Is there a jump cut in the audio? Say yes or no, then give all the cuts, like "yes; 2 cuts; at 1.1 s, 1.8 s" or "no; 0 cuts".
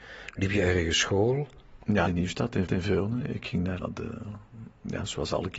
yes; 3 cuts; at 2.1 s, 2.7 s, 3.8 s